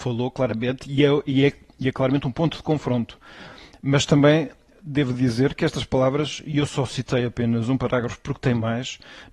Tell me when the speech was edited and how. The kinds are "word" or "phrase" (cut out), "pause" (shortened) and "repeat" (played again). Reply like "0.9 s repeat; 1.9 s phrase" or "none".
none